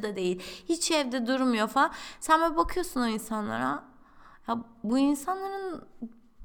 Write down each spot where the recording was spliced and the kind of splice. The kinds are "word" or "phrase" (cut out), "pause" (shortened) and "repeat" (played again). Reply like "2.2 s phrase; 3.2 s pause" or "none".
none